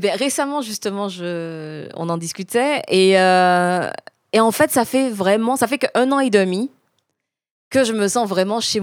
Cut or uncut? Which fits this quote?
uncut